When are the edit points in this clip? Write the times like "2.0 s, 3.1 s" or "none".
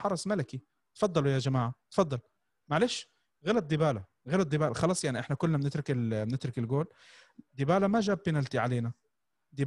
none